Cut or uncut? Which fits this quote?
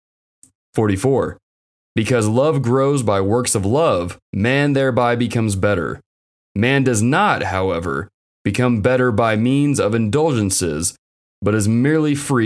cut